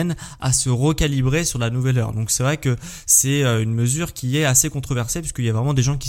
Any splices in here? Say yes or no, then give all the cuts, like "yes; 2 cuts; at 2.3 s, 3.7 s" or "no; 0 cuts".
no; 0 cuts